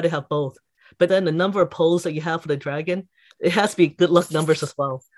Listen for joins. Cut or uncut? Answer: cut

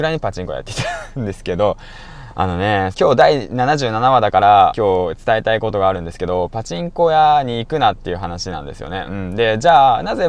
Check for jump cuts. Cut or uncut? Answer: cut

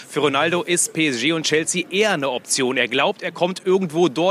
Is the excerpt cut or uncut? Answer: uncut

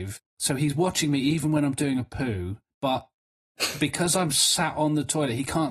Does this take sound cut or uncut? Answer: uncut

